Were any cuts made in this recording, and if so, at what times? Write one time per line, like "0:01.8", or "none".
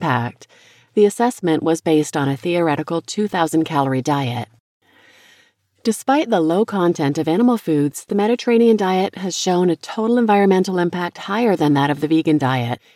none